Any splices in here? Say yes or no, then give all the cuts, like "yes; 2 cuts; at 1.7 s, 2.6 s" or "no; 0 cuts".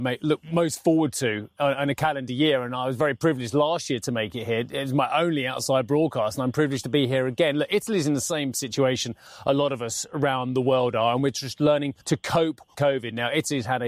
yes; 2 cuts; at 12.0 s, 12.7 s